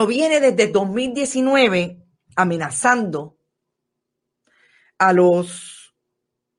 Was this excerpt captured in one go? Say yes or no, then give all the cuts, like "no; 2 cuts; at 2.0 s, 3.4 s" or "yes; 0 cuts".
yes; 0 cuts